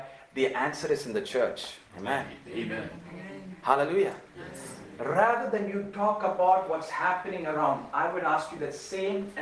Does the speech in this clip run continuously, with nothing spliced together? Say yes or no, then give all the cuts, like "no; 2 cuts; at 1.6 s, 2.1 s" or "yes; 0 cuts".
yes; 0 cuts